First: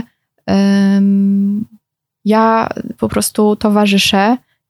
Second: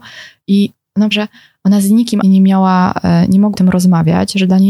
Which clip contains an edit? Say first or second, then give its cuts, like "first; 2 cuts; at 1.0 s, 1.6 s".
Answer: second; 3 cuts; at 1.1 s, 2.2 s, 3.5 s